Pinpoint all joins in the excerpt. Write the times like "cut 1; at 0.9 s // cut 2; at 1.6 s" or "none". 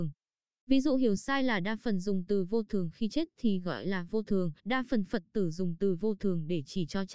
cut 1; at 4.6 s